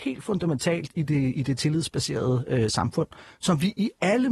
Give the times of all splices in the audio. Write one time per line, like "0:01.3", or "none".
none

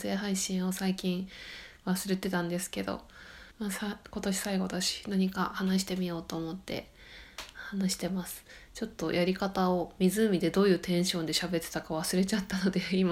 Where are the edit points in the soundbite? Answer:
0:03.5

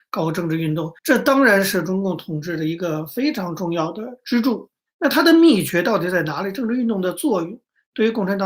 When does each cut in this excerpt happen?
0:01.0
0:04.9

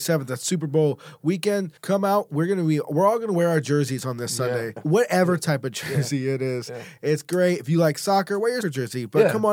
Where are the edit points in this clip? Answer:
0:01.8
0:04.8
0:08.6

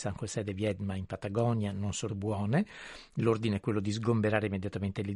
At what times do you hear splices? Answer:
0:02.1

